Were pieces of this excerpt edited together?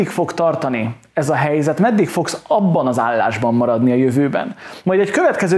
no; 0 cuts

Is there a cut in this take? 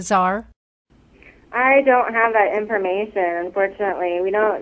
no; 0 cuts

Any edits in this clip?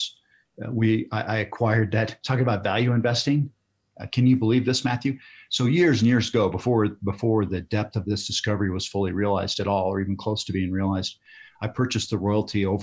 no; 0 cuts

